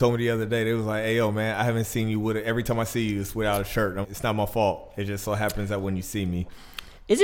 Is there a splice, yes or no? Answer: yes